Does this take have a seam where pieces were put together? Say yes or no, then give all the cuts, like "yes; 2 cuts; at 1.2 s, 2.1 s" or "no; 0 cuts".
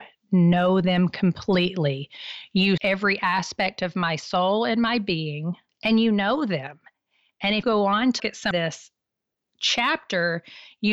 yes; 4 cuts; at 2.8 s, 7.6 s, 8.2 s, 8.5 s